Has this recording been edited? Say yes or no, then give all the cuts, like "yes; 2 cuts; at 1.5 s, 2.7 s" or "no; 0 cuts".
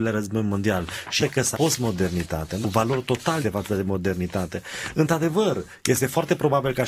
yes; 4 cuts; at 1.2 s, 1.5 s, 2.6 s, 3.4 s